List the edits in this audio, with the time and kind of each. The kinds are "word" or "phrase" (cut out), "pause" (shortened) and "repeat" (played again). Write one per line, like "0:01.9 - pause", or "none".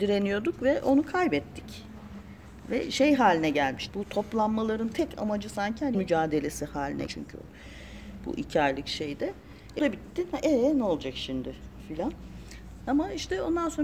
0:03.9 - word
0:05.9 - word
0:07.1 - word
0:09.8 - word